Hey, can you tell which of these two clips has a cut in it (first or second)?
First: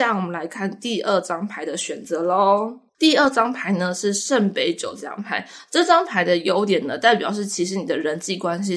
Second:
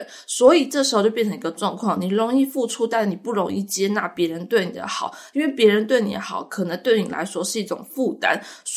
first